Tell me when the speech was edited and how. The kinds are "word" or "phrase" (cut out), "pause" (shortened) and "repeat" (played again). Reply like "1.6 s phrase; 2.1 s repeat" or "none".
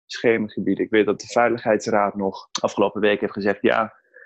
1.2 s word; 2.5 s pause